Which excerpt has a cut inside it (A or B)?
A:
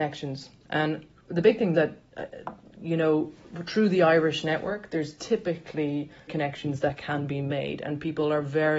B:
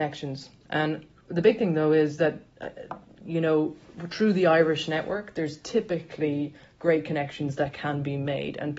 A